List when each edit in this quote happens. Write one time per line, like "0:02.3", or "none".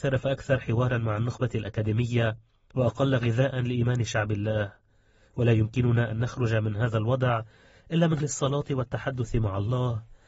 0:08.2